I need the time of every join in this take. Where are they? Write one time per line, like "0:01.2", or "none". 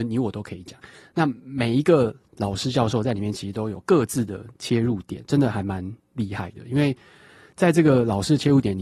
none